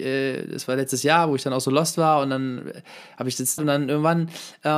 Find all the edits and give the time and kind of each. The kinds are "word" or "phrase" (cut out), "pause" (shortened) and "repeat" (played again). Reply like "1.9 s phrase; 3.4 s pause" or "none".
3.6 s word